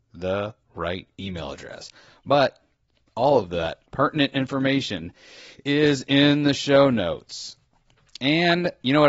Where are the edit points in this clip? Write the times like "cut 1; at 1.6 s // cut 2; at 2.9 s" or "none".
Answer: none